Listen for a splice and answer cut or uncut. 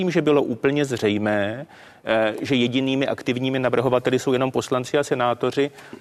uncut